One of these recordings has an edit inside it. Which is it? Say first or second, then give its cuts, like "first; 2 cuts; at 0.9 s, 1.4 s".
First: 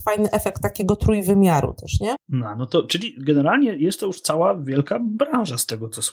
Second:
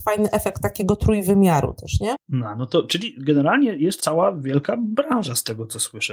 second; 1 cut; at 4.0 s